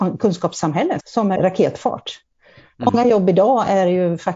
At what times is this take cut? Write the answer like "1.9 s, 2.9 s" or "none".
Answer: 1.0 s, 1.4 s